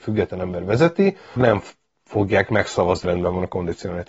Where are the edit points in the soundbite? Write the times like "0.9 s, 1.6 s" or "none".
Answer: 1.4 s, 3.0 s